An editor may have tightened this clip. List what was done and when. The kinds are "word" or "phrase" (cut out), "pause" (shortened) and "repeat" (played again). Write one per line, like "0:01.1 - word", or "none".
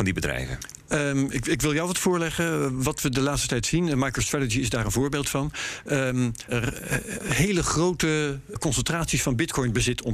0:06.5 - phrase
0:08.6 - word

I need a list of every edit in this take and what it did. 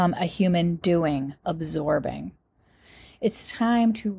0:01.4 - word

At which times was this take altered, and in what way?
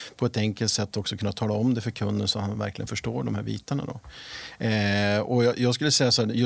none

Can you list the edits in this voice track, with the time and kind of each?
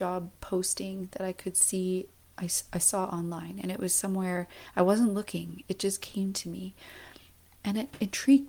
0:02.1 - pause

